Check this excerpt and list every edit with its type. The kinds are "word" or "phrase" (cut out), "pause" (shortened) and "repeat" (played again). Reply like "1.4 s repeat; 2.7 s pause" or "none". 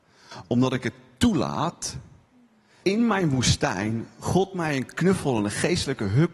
2.8 s word